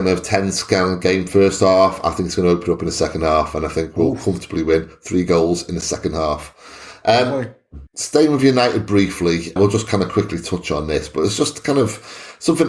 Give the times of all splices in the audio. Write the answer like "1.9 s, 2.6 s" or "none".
7.9 s, 9.6 s